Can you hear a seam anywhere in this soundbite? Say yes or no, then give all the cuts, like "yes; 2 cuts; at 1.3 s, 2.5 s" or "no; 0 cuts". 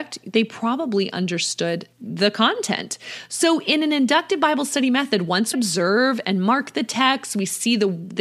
yes; 2 cuts; at 1.9 s, 5.5 s